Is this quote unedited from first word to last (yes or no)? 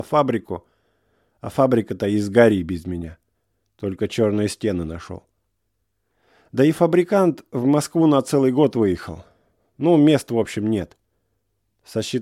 yes